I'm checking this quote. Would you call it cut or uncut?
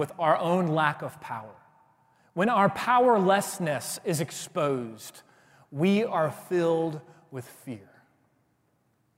uncut